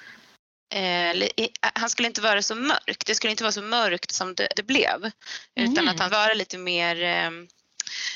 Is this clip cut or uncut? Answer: cut